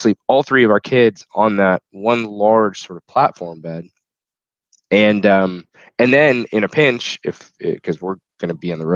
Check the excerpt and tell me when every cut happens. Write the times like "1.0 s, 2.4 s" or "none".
none